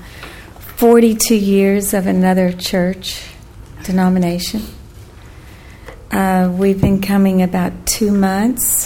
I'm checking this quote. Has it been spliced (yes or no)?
no